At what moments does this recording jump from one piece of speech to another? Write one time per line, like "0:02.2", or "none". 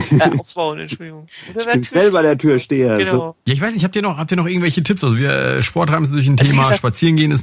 none